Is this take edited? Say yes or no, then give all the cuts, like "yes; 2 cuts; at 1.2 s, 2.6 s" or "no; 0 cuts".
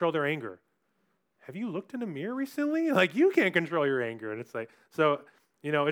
no; 0 cuts